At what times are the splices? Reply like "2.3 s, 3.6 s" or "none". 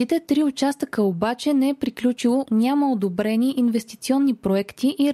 2.5 s